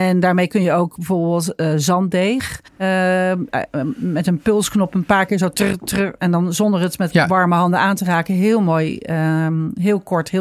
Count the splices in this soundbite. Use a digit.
1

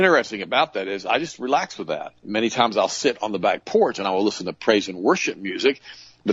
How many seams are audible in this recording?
1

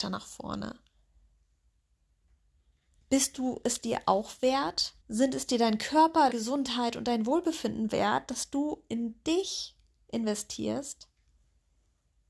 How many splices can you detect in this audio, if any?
2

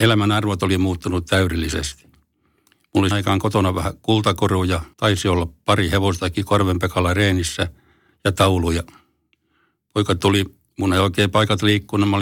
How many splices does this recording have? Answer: 2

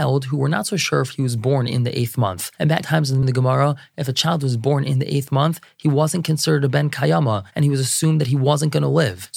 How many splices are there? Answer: 2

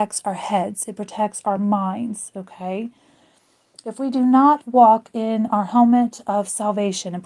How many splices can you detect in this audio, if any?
0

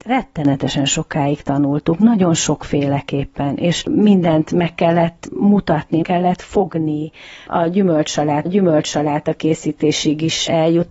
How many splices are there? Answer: 2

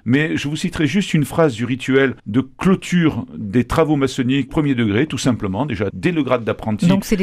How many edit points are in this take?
3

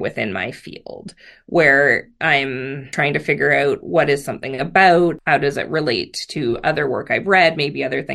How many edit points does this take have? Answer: 0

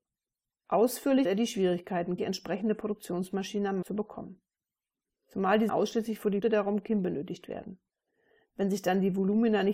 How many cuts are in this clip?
5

